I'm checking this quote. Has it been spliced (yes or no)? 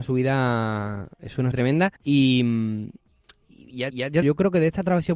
yes